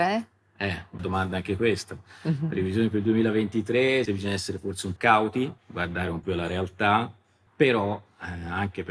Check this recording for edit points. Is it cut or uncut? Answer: cut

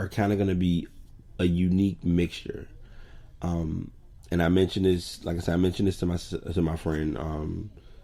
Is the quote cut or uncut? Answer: uncut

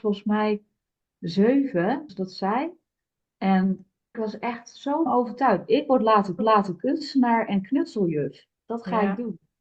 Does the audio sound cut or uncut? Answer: cut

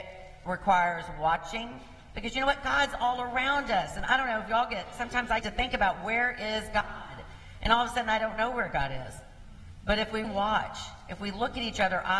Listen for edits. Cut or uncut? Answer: cut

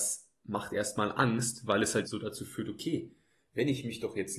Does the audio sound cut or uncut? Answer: cut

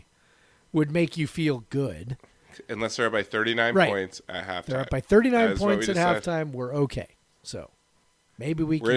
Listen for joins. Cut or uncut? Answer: uncut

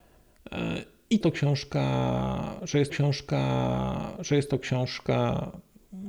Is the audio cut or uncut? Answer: cut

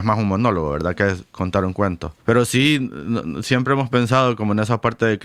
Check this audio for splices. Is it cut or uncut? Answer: cut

